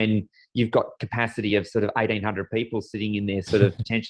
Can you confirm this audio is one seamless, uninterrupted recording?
yes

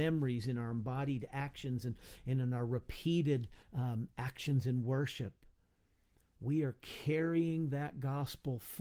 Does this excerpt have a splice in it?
yes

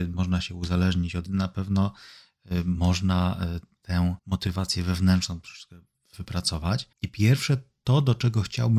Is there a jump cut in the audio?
yes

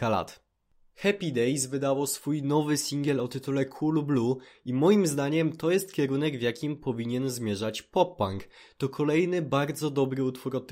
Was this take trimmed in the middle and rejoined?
no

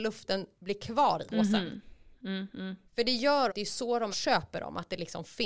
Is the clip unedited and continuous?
no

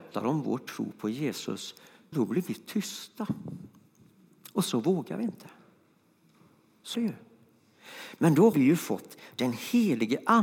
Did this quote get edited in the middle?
yes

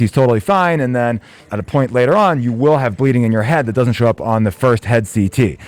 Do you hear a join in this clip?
no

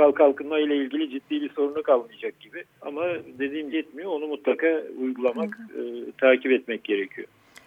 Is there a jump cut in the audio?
yes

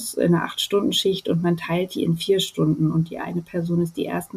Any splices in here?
no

